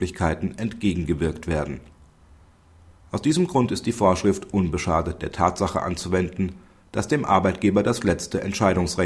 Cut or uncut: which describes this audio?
uncut